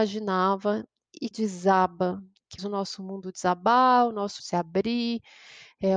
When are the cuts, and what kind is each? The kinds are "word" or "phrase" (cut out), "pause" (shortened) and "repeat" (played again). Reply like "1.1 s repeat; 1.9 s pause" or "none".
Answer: 1.3 s word; 2.6 s word; 4.4 s word

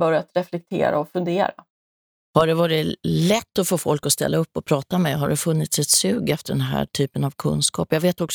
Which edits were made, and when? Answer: none

